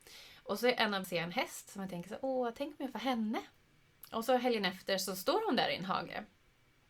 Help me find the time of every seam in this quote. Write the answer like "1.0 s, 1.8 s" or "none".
1.0 s, 2.9 s